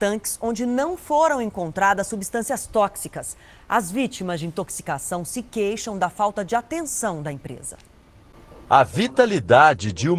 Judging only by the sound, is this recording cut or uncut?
uncut